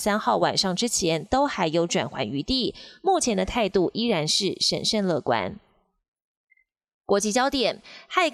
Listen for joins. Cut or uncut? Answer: uncut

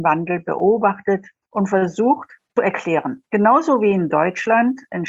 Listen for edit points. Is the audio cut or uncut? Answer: cut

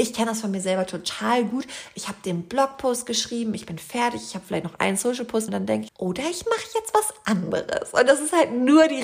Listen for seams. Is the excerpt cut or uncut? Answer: cut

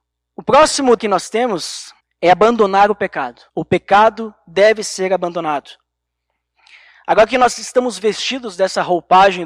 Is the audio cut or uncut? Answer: cut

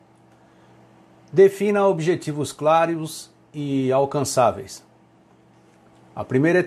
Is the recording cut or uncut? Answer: uncut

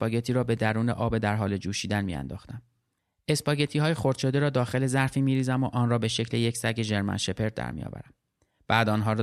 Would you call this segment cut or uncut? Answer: uncut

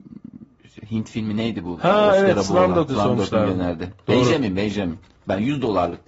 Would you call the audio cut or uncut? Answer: cut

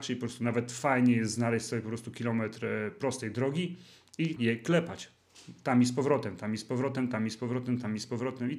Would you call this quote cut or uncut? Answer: cut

